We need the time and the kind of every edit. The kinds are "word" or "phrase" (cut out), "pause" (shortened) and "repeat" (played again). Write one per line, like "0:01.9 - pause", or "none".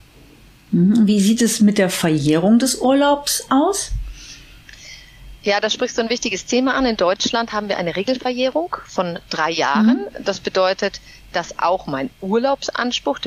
none

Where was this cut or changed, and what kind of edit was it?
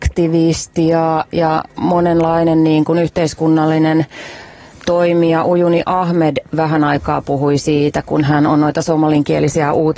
none

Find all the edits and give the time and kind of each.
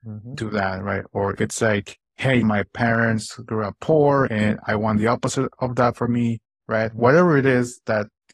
0:01.4 - word
0:02.0 - pause
0:04.3 - word
0:06.6 - phrase

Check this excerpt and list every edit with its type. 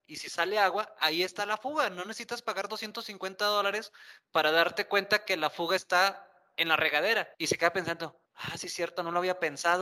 0:07.3 - pause
0:08.3 - pause

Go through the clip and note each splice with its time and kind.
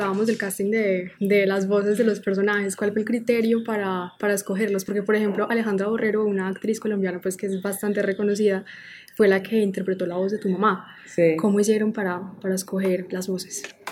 0:01.2 - pause

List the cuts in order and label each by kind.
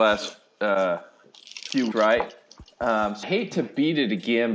0:01.9 - word
0:03.2 - word

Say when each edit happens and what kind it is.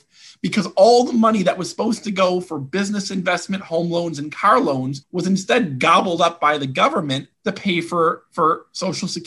0:05.0 - pause
0:07.3 - pause

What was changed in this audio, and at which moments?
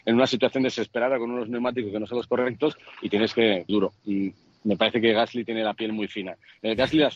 0:03.7 - word

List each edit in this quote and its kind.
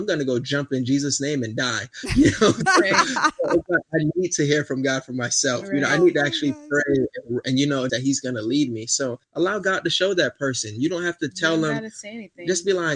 0:07.9 - phrase
0:09.2 - pause

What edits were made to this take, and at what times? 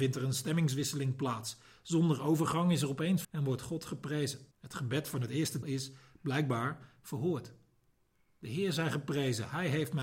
0:03.2 - word
0:04.5 - pause
0:05.6 - word

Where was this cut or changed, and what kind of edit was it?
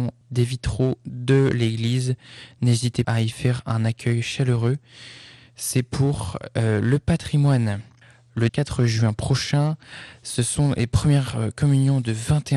0:03.0 - word
0:08.5 - word

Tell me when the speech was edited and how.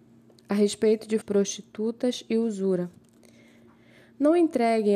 0:01.2 - word

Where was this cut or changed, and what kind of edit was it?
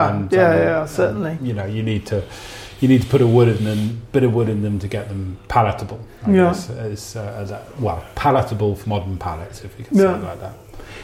0:08.8 - word

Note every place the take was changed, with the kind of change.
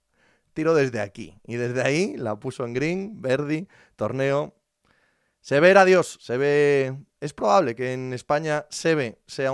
none

